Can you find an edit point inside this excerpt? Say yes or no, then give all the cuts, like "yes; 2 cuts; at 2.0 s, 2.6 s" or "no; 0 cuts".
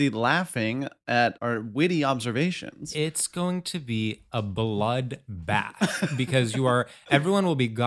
yes; 1 cut; at 1.4 s